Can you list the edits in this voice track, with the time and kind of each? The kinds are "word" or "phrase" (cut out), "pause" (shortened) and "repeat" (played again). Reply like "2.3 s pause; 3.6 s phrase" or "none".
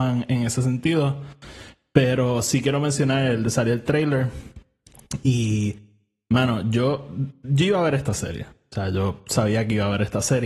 none